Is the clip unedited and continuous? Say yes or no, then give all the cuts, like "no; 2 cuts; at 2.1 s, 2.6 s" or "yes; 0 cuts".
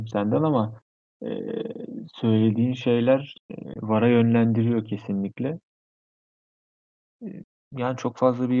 yes; 0 cuts